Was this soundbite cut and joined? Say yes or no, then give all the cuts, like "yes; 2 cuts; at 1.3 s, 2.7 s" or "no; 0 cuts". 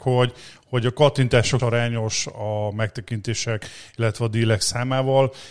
yes; 1 cut; at 1.6 s